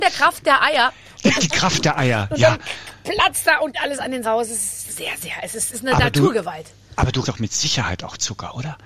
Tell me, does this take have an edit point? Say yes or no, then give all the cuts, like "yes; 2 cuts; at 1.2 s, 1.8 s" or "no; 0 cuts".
yes; 7 cuts; at 1.4 s, 3.4 s, 3.7 s, 4.2 s, 4.9 s, 5.7 s, 7.2 s